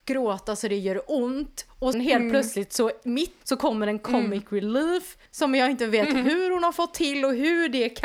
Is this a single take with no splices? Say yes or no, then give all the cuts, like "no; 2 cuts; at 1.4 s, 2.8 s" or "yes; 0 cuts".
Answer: no; 3 cuts; at 1.9 s, 3.4 s, 5.3 s